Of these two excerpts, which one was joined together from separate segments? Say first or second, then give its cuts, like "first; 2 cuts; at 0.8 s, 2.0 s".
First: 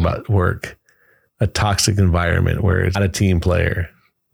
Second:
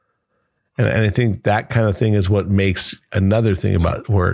first; 1 cut; at 2.9 s